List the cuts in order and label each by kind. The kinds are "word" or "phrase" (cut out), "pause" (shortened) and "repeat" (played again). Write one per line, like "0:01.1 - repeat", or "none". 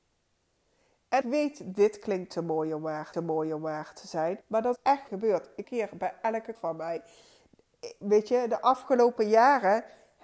0:01.2 - word
0:03.1 - repeat
0:04.4 - pause
0:04.8 - word
0:05.1 - phrase
0:05.6 - phrase
0:06.5 - word